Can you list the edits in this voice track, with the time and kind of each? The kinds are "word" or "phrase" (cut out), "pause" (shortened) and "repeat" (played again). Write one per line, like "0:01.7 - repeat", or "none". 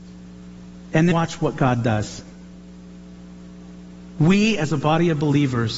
0:01.1 - word